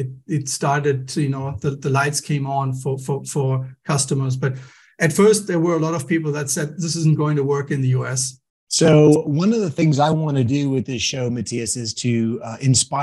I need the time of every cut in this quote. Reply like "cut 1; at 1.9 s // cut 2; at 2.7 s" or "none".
none